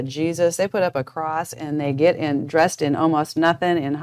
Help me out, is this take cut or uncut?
uncut